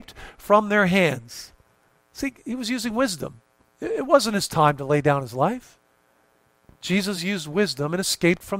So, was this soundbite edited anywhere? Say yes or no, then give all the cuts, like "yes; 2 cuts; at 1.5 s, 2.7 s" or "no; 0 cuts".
no; 0 cuts